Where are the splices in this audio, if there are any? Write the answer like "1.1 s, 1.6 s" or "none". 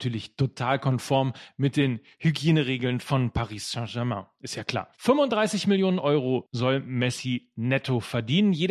4.9 s